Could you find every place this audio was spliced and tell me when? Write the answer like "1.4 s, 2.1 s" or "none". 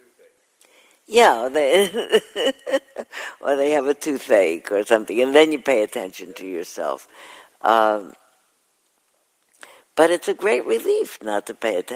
none